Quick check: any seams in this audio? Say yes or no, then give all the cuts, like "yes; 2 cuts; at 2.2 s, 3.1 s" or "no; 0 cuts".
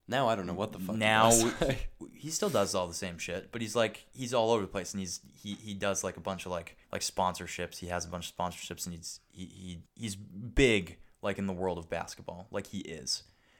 yes; 2 cuts; at 6.8 s, 9.9 s